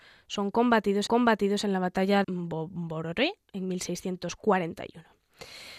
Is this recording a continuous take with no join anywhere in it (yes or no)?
no